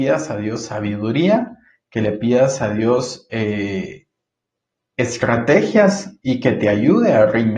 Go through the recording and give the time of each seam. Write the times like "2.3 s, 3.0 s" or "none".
none